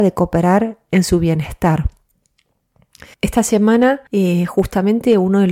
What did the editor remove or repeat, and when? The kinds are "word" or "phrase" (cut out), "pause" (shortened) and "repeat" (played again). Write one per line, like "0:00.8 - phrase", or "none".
0:03.1 - pause
0:04.1 - pause